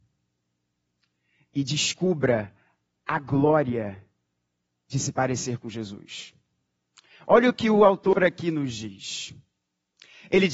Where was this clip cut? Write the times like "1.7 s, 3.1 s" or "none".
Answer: none